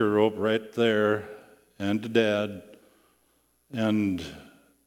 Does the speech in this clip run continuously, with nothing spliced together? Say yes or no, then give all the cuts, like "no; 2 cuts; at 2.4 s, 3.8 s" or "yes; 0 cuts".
yes; 0 cuts